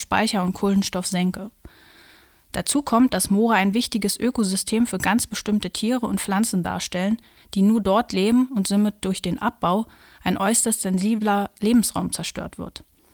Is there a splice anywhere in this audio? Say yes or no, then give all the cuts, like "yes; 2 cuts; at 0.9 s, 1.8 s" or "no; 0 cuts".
no; 0 cuts